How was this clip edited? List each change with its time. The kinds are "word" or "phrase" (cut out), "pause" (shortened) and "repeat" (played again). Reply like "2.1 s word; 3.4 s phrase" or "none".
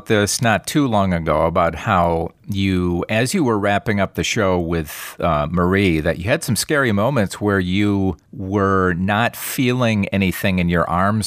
2.4 s pause